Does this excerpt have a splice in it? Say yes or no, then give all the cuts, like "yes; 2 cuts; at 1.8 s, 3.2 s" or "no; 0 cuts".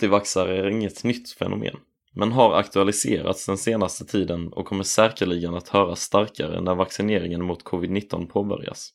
no; 0 cuts